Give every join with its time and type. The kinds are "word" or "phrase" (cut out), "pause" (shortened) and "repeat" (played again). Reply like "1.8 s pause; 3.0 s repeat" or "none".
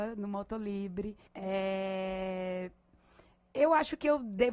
1.3 s pause